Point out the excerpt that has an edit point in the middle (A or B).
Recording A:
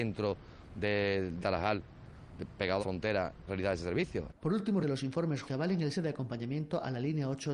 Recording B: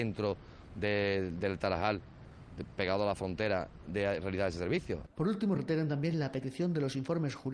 A